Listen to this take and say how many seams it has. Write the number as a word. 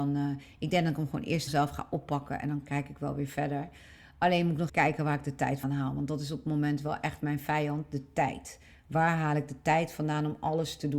three